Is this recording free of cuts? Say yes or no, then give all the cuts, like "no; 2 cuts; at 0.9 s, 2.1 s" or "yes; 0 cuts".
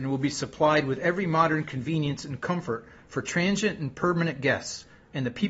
yes; 0 cuts